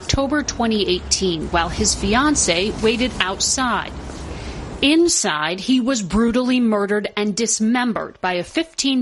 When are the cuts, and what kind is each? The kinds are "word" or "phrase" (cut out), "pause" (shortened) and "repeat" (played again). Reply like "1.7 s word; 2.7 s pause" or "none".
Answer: none